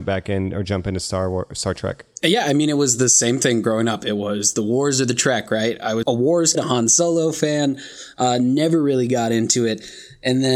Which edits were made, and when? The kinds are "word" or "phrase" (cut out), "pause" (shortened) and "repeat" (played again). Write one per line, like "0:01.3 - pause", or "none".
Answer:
0:02.2 - pause
0:06.0 - word
0:06.5 - word

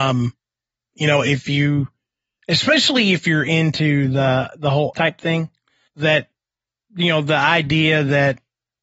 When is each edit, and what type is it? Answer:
0:04.9 - phrase
0:05.9 - word

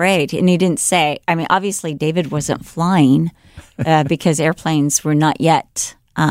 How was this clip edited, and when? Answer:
none

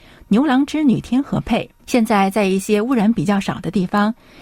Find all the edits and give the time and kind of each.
0:01.8 - pause

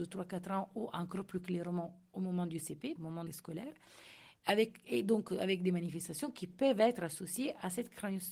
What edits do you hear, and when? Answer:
0:03.0 - word
0:03.3 - phrase
0:04.4 - pause

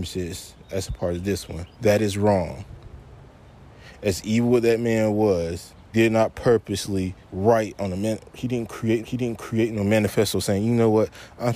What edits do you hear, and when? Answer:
0:01.7 - pause
0:05.9 - word
0:07.2 - pause
0:09.0 - repeat

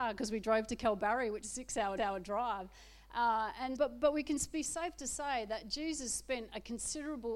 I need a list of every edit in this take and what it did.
0:01.4 - word
0:02.0 - repeat
0:03.7 - word

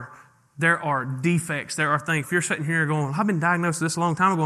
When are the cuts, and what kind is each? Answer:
0:02.2 - word

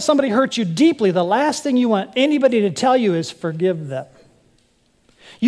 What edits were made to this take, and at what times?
none

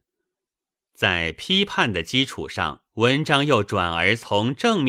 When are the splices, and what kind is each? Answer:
0:02.9 - pause

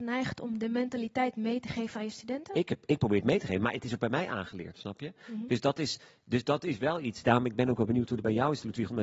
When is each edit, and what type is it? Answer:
none

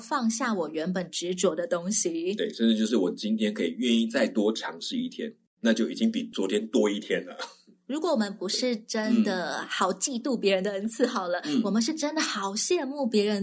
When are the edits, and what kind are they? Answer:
none

